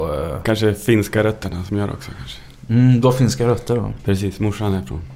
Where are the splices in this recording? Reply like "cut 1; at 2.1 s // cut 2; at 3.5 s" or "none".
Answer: none